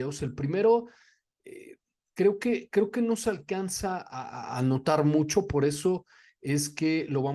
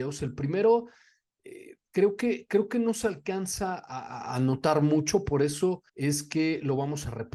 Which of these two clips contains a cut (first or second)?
second